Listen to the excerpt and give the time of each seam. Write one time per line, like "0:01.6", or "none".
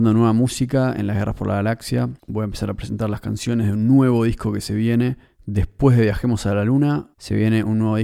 0:02.2
0:05.3
0:07.1